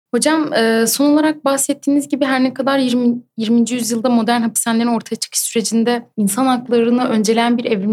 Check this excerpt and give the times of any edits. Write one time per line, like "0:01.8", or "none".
0:06.1